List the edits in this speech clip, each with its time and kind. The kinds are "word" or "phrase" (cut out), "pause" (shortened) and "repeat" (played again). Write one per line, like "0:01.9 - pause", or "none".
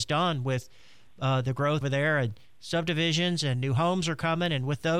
0:01.8 - word